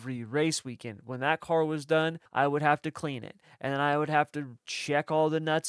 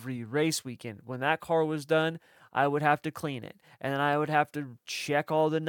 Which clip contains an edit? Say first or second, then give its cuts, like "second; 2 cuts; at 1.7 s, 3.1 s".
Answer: first; 1 cut; at 2.3 s